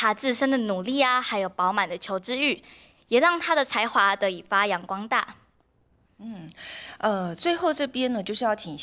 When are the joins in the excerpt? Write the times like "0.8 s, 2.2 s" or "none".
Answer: none

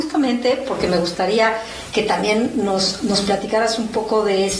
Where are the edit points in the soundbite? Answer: none

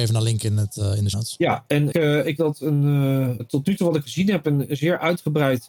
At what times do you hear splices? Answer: 1.1 s, 1.9 s, 2.4 s, 3.4 s, 4.0 s

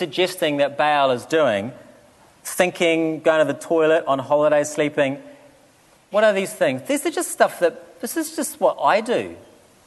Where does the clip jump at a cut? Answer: none

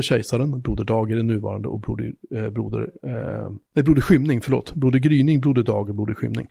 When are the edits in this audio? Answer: 3.7 s

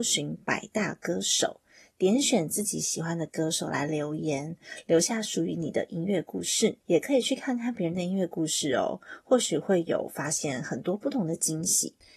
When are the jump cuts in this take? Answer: 6.8 s

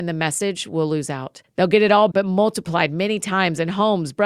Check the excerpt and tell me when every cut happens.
1.4 s, 2.1 s

